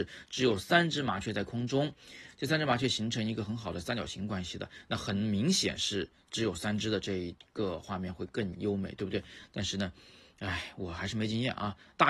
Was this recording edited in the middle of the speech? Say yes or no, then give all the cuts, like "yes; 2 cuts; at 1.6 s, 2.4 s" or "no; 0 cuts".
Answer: no; 0 cuts